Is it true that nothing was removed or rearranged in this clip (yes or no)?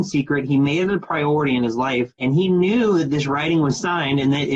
no